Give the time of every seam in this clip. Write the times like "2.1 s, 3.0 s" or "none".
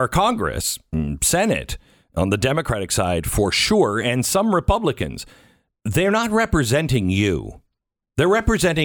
none